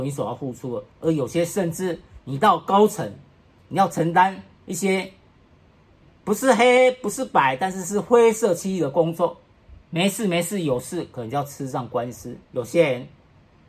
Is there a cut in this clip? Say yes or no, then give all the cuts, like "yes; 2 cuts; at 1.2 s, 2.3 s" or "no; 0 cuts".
yes; 3 cuts; at 0.9 s, 9.8 s, 12.4 s